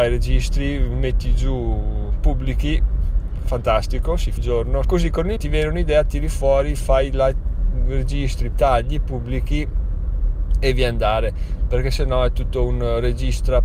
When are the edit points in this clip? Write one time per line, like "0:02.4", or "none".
0:04.4
0:04.8
0:05.4
0:08.5